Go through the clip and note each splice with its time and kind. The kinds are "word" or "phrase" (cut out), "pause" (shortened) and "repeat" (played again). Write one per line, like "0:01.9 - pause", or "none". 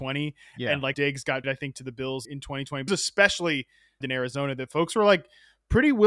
0:00.9 - word
0:01.4 - word
0:02.2 - word
0:02.9 - word
0:04.0 - phrase